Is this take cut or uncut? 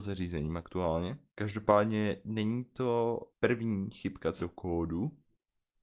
cut